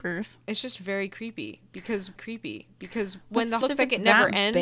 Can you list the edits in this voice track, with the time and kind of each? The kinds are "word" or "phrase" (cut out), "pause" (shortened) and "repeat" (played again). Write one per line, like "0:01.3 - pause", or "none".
0:02.2 - repeat
0:03.6 - word